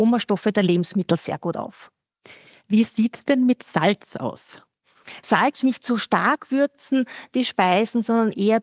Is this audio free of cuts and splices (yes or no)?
no